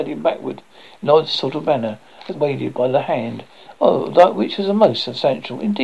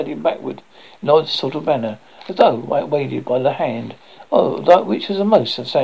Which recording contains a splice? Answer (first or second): first